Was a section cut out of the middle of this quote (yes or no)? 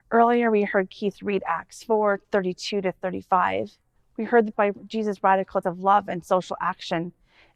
yes